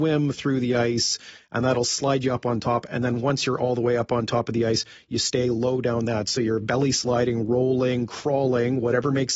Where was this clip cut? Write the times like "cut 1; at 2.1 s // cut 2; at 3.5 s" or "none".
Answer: none